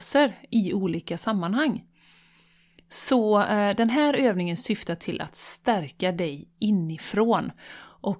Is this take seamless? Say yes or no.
yes